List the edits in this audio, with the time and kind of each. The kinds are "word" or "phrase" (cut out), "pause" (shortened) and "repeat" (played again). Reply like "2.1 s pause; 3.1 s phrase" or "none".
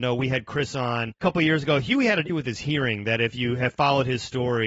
2.3 s word